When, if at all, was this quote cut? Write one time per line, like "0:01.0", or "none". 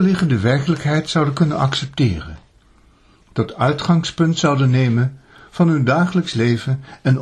none